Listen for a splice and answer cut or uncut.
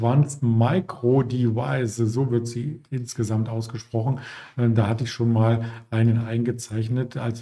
cut